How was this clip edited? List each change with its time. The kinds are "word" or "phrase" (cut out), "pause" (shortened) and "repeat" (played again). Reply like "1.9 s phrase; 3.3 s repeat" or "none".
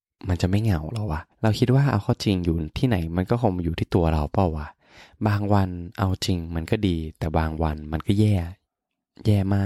1.3 s pause